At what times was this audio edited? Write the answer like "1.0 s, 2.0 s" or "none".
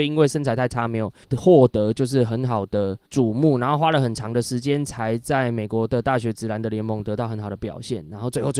1.2 s, 3.0 s